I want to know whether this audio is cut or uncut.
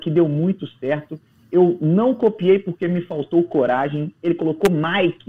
uncut